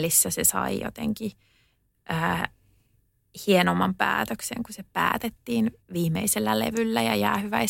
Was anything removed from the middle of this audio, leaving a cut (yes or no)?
yes